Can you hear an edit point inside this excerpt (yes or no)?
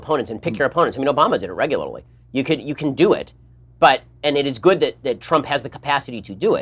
no